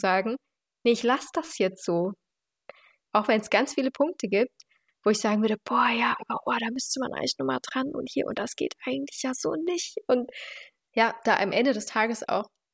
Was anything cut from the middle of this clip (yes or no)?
no